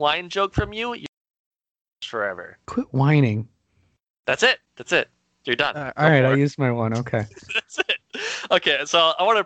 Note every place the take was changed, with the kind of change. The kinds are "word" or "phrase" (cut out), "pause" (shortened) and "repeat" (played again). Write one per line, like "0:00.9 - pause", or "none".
0:02.6 - pause
0:04.7 - pause